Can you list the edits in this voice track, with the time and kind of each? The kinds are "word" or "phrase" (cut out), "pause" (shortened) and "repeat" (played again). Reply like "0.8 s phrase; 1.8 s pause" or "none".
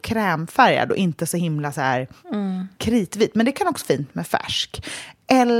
3.8 s word